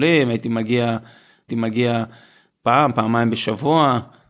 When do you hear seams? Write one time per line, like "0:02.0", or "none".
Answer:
0:01.5